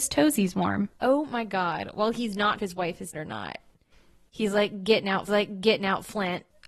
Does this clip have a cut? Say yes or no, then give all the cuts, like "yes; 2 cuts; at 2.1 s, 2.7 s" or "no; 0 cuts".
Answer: yes; 4 cuts; at 1.0 s, 2.6 s, 3.1 s, 5.3 s